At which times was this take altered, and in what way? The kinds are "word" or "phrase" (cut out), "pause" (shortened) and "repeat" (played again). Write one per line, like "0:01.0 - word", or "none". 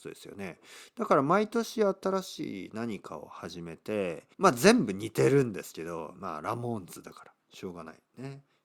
0:04.3 - pause